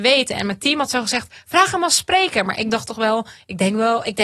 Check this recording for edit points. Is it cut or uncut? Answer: uncut